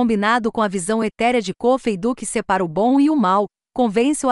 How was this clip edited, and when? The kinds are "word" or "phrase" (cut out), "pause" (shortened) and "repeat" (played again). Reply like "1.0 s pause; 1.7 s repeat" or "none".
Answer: none